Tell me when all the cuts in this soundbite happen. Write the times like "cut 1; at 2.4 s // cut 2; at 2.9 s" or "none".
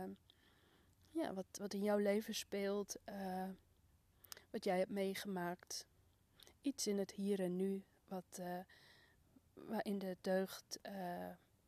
none